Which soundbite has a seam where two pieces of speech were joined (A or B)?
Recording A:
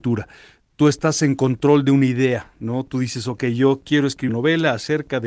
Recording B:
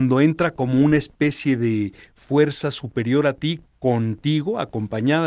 A